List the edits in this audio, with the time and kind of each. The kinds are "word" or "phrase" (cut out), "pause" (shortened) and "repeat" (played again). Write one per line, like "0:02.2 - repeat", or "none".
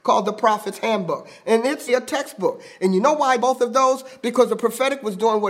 0:01.9 - word
0:03.4 - word

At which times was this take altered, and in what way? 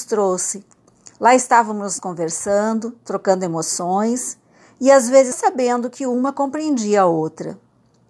0:02.0 - word
0:05.3 - word

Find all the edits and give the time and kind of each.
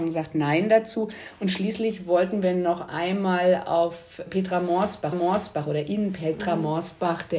0:04.3 - word
0:05.1 - repeat

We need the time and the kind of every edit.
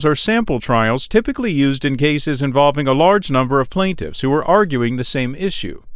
none

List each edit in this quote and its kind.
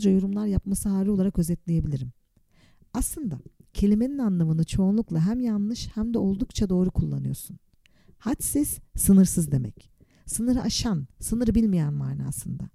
none

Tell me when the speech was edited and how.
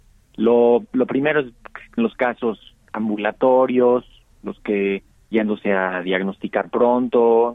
0:02.0 - word
0:04.6 - word
0:05.3 - word

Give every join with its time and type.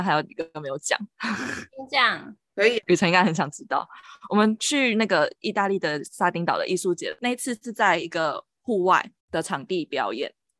0:09.2 - pause

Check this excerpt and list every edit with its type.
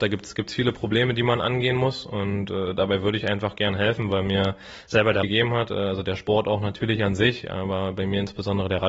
0:05.2 - phrase

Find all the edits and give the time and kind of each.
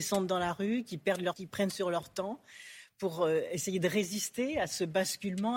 0:01.3 - word

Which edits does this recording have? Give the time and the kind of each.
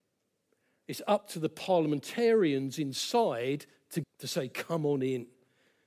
0:04.0 - phrase

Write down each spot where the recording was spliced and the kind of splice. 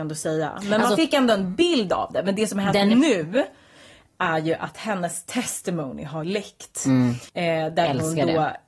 0:06.2 - word
0:07.3 - pause

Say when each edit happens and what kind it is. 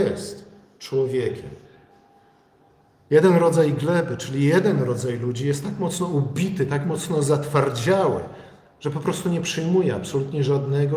none

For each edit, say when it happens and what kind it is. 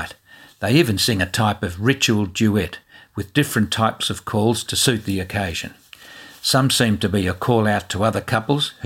none

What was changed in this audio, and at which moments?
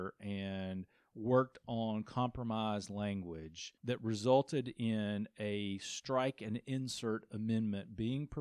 0:03.8 - pause

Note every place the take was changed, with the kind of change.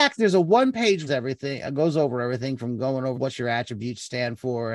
0:01.1 - phrase
0:03.1 - word

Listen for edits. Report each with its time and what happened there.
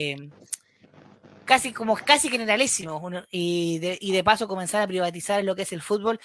none

